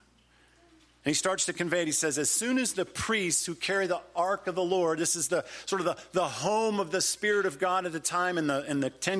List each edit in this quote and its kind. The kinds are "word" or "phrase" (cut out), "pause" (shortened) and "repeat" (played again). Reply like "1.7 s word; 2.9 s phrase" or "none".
none